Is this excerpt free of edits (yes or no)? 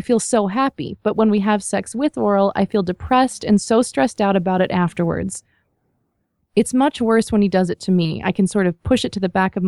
yes